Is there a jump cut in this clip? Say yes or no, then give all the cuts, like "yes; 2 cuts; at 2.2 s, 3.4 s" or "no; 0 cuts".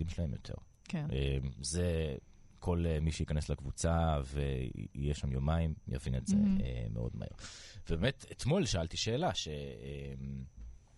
no; 0 cuts